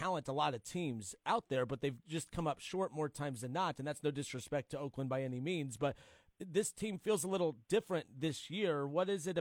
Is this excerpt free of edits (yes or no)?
yes